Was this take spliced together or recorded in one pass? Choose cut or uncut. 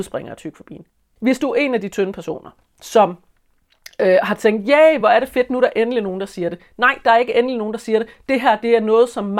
uncut